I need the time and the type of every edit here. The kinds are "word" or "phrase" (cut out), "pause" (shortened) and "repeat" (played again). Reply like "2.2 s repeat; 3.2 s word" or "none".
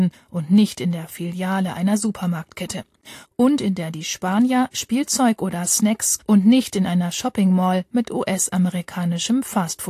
6.2 s phrase